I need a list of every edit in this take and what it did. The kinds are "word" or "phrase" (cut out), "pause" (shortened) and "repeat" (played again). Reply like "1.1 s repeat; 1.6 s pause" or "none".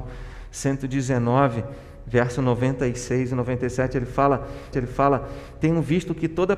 4.7 s repeat